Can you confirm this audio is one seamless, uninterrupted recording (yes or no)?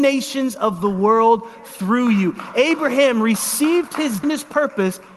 no